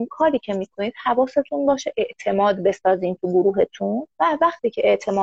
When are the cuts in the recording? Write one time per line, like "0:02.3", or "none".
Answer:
0:04.1